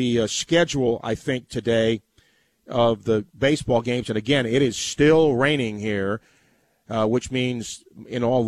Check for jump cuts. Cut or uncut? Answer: uncut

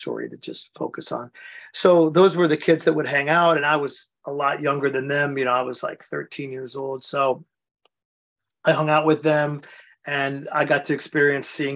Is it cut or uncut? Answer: uncut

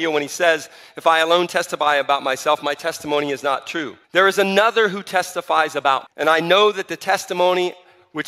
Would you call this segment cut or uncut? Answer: cut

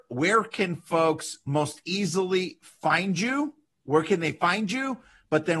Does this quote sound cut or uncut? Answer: uncut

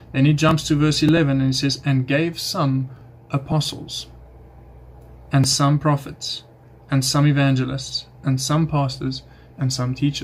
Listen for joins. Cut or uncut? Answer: uncut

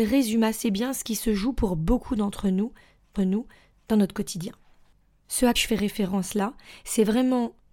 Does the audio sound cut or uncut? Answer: cut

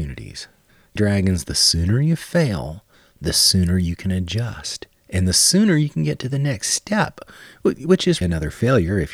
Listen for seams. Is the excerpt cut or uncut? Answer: cut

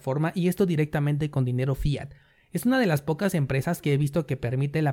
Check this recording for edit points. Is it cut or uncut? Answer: uncut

